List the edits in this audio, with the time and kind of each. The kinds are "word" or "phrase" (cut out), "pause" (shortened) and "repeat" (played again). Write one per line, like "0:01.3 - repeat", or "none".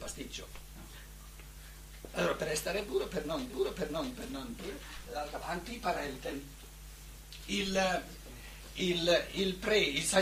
0:03.5 - repeat
0:04.6 - word
0:05.0 - word
0:07.4 - word